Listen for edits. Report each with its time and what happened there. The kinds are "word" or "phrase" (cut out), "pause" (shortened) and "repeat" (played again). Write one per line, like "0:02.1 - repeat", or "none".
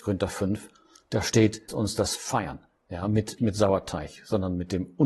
0:01.7 - word
0:02.2 - word
0:03.4 - word